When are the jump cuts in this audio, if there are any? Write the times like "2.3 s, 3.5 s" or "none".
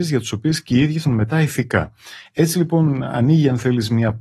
1.1 s